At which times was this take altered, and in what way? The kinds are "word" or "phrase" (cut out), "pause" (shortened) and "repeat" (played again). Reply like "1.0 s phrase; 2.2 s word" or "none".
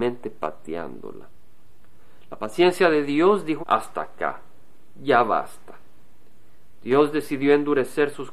3.6 s word